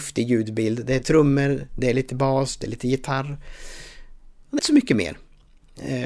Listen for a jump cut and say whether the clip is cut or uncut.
cut